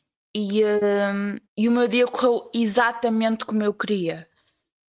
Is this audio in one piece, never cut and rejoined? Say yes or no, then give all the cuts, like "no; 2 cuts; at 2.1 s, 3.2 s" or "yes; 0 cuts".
no; 1 cut; at 1.5 s